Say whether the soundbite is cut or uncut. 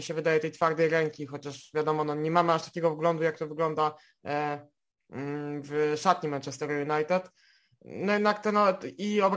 uncut